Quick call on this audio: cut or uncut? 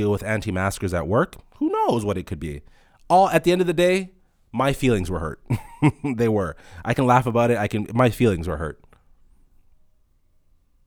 uncut